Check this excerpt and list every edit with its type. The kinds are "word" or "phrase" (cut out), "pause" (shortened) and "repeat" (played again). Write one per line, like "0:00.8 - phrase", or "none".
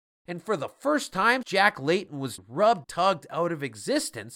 0:01.4 - word
0:02.4 - word
0:02.8 - word